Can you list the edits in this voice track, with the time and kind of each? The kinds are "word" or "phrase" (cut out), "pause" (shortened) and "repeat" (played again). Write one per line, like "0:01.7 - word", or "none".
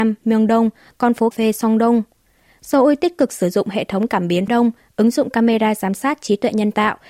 0:01.3 - word
0:04.5 - phrase